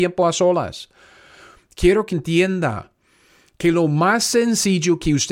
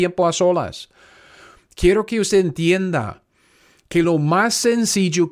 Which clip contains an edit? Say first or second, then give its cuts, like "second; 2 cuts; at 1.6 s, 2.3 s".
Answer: first; 1 cut; at 2.1 s